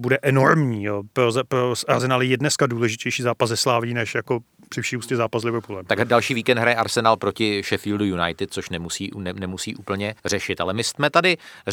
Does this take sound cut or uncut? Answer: cut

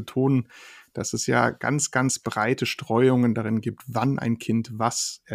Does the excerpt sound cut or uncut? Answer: uncut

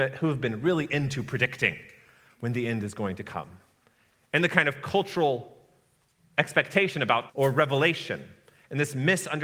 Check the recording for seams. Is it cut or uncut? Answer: cut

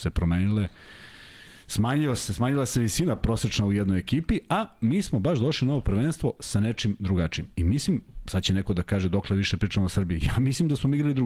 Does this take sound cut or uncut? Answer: uncut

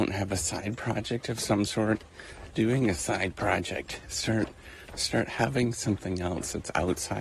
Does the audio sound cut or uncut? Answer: cut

